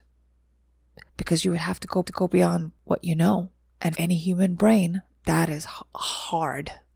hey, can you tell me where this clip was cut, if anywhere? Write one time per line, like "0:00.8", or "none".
0:01.1
0:02.0
0:03.9